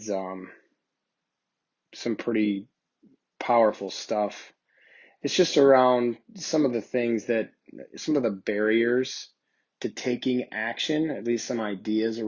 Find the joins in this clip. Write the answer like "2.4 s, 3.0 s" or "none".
none